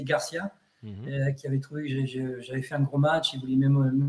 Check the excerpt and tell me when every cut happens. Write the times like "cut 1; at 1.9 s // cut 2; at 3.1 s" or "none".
none